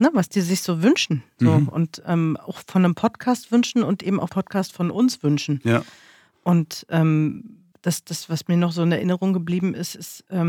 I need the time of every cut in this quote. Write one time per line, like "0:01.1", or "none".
0:04.3
0:07.7